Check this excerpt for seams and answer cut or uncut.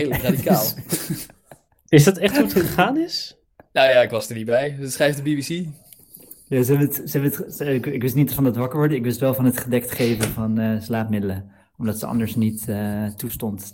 uncut